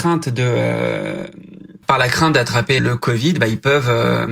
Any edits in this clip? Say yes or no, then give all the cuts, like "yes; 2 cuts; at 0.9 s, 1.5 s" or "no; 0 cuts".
yes; 2 cuts; at 1.8 s, 2.8 s